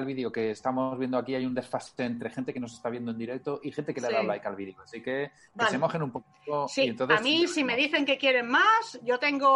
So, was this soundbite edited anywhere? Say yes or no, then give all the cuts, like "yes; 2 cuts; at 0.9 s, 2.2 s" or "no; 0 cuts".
no; 0 cuts